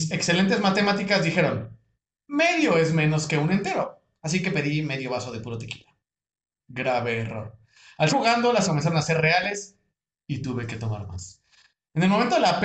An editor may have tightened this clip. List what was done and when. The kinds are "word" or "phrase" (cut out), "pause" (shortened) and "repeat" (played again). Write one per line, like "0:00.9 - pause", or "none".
0:08.1 - word
0:08.6 - word